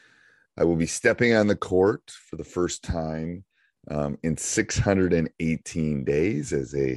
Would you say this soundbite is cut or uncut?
uncut